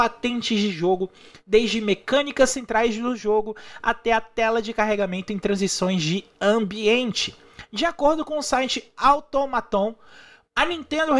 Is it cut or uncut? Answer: uncut